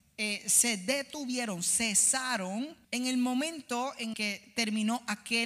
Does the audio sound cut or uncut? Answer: cut